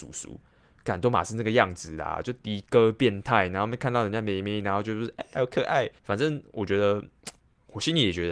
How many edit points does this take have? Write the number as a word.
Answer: three